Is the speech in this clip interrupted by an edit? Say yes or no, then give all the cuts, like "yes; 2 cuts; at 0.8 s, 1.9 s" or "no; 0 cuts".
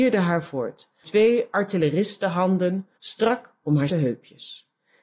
yes; 3 cuts; at 1.0 s, 2.9 s, 3.9 s